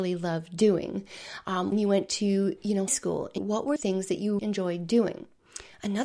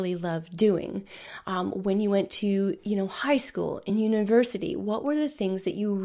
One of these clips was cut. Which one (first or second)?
first